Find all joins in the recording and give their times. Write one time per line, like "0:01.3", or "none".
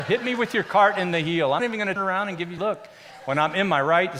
0:01.6
0:02.0
0:02.6